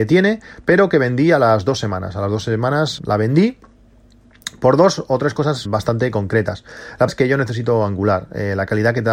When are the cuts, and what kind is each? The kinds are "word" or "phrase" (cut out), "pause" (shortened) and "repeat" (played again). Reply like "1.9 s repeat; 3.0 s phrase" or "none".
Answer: 3.0 s word; 5.6 s word; 7.1 s word